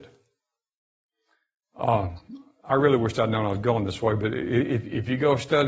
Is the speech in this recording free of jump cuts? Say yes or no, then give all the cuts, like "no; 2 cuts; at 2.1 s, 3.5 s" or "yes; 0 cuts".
yes; 0 cuts